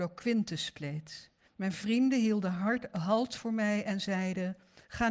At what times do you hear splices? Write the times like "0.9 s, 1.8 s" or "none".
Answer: 1.5 s